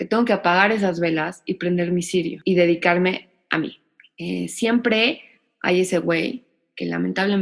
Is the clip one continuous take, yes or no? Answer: yes